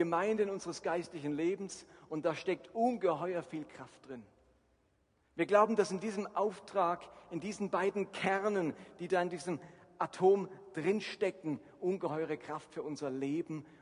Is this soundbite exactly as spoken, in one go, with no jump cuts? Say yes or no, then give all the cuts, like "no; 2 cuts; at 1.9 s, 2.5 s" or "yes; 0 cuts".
yes; 0 cuts